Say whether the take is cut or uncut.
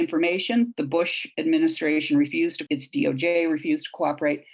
cut